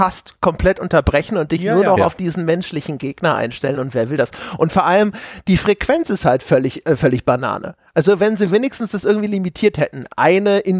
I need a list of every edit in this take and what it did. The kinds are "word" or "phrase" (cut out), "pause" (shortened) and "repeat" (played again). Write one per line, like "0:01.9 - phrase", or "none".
none